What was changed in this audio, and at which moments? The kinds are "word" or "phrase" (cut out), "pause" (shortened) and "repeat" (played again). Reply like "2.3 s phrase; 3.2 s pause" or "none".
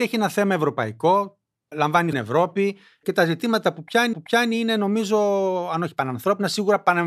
1.7 s phrase; 2.1 s phrase; 4.1 s repeat